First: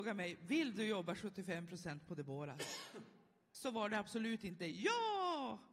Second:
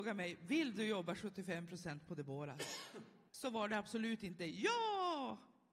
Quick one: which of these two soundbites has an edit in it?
second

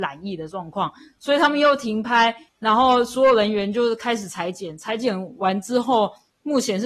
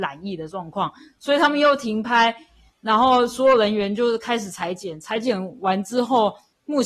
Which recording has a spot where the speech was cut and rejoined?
first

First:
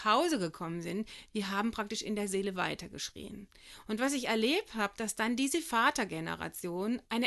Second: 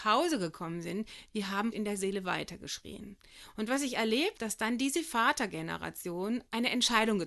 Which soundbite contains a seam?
second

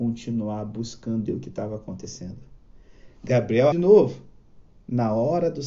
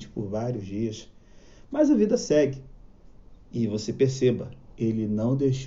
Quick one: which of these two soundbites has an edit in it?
first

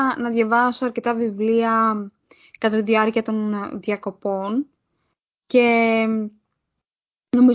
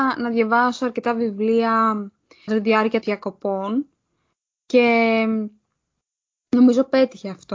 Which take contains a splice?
second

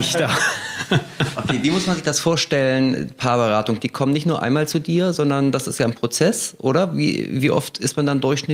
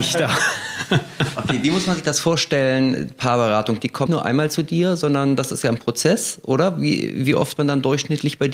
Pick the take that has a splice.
second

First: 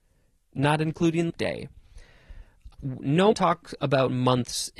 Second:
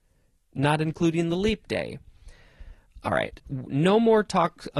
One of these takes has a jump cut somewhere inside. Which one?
first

